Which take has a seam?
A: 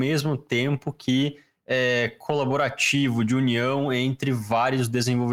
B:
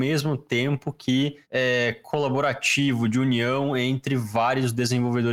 B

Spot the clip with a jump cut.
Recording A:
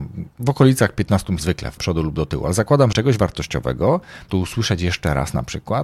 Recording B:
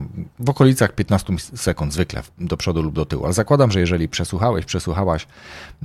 A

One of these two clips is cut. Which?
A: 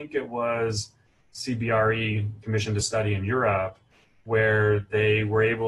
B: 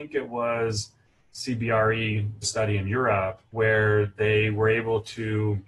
B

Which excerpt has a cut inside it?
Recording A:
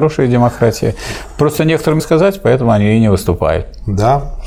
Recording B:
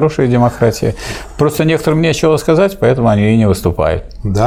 A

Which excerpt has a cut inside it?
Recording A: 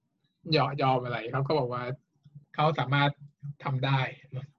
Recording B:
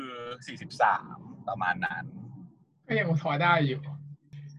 A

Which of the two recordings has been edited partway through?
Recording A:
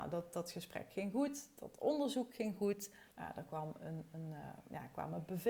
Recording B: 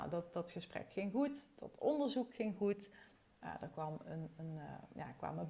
A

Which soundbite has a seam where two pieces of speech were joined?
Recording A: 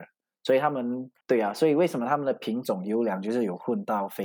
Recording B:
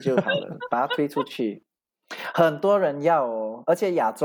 A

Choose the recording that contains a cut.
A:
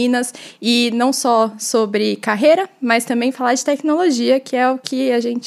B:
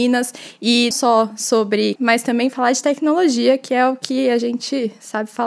B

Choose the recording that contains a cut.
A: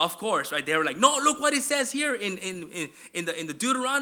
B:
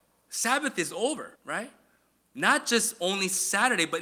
B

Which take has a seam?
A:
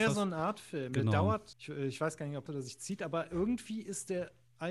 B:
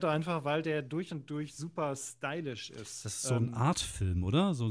A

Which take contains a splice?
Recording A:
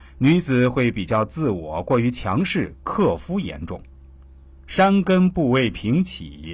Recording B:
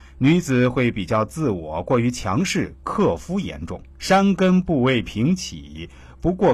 B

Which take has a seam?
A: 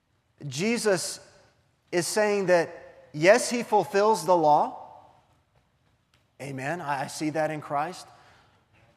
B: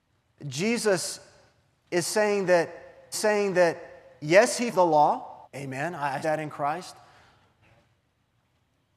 B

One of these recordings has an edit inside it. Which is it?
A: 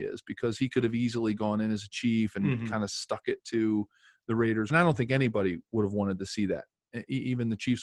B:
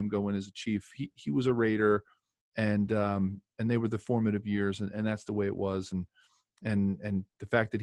A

